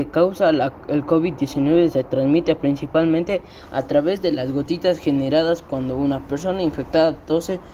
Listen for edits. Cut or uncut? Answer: uncut